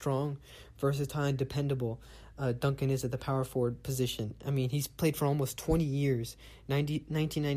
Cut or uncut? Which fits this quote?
uncut